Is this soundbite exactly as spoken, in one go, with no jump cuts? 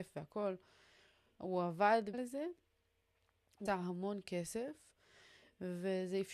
no; 2 cuts; at 2.1 s, 3.7 s

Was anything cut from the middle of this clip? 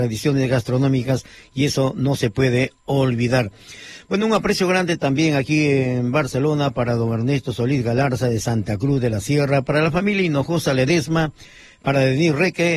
no; 0 cuts

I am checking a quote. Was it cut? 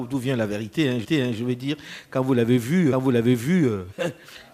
yes; 2 cuts; at 1.0 s, 2.9 s

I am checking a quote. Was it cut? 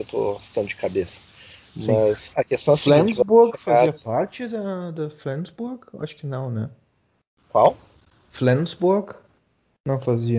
no; 0 cuts

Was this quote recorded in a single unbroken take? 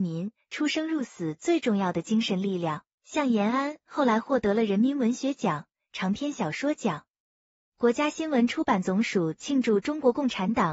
no; 1 cut; at 2.9 s

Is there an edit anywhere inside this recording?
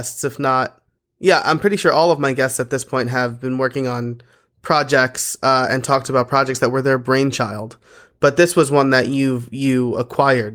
no; 0 cuts

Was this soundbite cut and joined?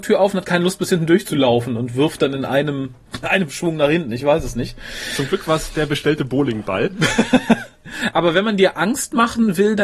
yes; 1 cut; at 3.2 s

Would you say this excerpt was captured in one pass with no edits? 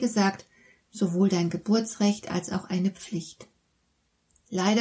yes; 0 cuts

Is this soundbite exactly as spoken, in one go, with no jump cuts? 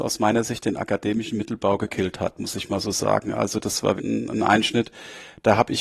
no; 1 cut; at 4.0 s

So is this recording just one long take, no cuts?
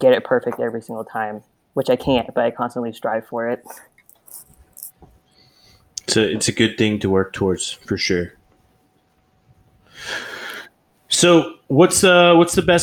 yes; 0 cuts

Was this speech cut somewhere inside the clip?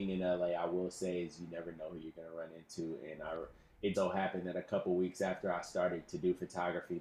yes; 1 cut; at 3.9 s

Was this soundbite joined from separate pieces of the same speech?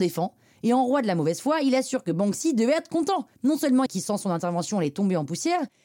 yes; 2 cuts; at 3.3 s, 3.9 s

